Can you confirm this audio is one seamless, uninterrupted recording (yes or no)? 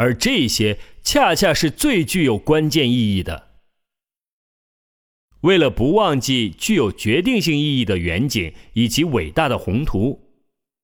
yes